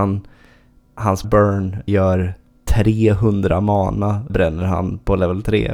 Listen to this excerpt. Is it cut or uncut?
cut